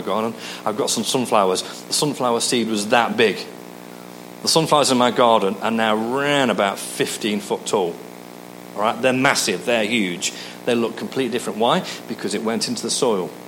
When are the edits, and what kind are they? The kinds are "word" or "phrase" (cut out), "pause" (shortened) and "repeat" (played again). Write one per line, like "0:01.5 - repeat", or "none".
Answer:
none